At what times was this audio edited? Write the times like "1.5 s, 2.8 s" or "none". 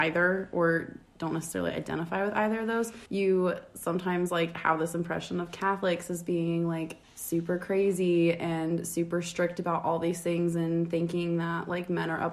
3.1 s, 7.0 s